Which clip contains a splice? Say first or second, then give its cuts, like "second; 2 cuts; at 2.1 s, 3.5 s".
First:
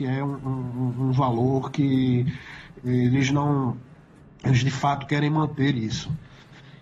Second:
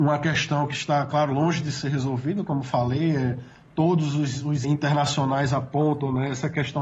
second; 1 cut; at 4.6 s